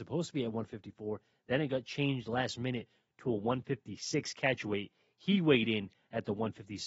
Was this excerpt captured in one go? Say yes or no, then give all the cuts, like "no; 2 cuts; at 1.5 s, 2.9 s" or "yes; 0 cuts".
yes; 0 cuts